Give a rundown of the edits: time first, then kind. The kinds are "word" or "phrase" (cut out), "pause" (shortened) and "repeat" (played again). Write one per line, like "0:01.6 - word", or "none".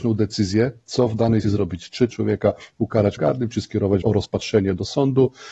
0:01.4 - word
0:02.1 - word
0:03.2 - word
0:04.0 - word